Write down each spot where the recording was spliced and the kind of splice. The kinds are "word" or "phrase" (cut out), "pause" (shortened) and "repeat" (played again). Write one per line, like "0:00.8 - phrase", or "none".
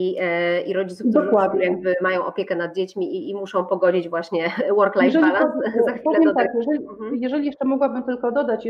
none